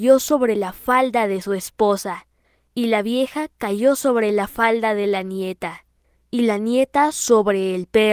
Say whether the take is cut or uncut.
uncut